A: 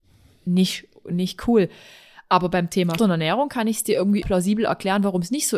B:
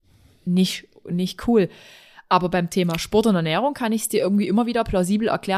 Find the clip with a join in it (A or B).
A